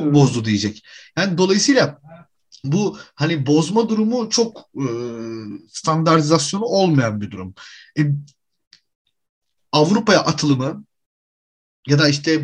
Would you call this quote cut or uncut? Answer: uncut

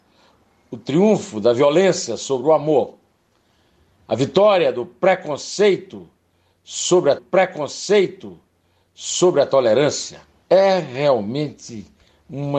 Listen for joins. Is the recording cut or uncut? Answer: cut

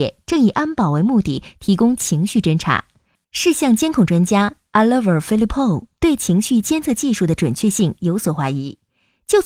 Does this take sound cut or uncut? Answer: uncut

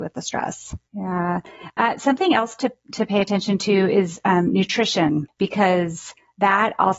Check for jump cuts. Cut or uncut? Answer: uncut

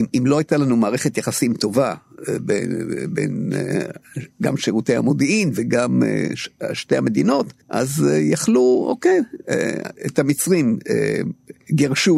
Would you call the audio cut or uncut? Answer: cut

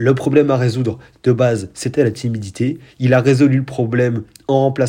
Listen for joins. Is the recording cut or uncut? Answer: uncut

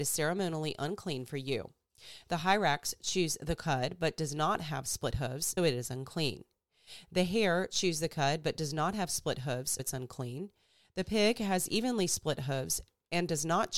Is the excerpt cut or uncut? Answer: cut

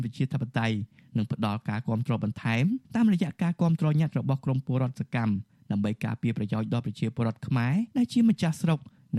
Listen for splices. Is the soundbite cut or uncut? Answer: cut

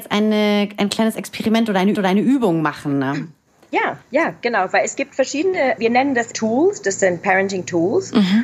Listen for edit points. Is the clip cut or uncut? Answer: cut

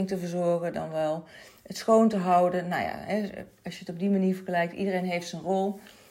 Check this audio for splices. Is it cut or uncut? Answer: uncut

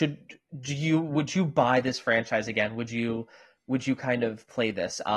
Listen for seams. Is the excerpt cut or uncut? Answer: uncut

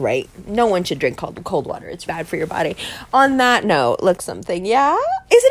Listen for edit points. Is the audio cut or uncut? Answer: cut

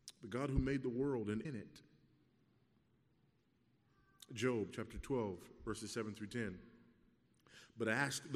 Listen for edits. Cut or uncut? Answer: cut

